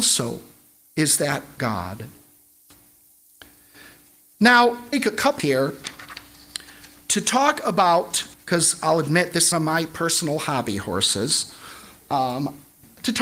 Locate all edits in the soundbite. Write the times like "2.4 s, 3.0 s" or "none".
1.6 s, 4.9 s, 5.4 s, 8.3 s, 9.5 s